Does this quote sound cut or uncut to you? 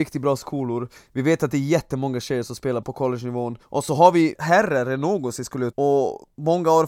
cut